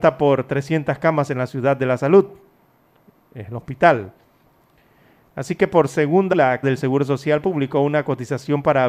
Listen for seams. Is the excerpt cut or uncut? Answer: cut